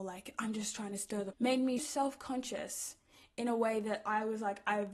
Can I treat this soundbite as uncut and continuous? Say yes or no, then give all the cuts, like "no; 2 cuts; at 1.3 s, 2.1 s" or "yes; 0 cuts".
no; 2 cuts; at 1.3 s, 1.8 s